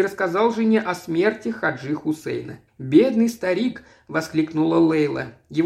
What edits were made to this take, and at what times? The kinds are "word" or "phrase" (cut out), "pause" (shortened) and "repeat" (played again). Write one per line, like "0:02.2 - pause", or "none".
0:02.7 - pause